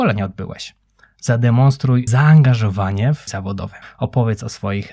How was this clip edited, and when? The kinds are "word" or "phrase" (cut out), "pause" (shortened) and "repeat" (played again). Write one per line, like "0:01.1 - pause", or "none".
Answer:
0:02.1 - word
0:03.3 - word
0:03.8 - pause